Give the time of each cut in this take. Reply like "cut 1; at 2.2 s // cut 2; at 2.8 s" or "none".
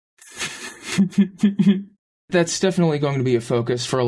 cut 1; at 2.2 s